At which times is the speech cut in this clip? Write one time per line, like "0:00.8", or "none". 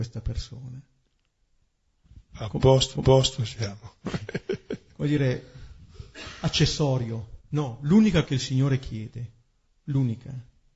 0:02.9
0:07.4
0:08.2
0:09.7